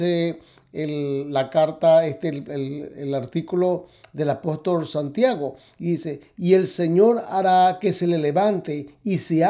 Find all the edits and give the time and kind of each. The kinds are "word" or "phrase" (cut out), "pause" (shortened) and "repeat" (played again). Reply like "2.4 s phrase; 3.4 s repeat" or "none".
none